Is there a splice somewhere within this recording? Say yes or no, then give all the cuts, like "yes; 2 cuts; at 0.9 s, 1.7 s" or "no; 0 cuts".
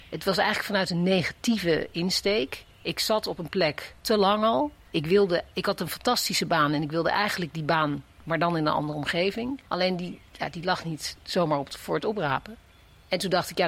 yes; 3 cuts; at 4.0 s, 9.6 s, 12.7 s